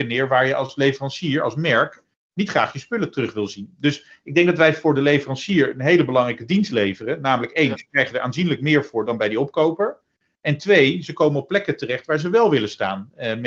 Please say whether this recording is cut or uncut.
uncut